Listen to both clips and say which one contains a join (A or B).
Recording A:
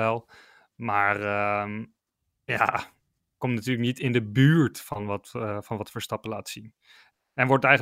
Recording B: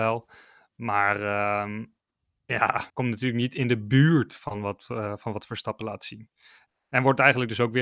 B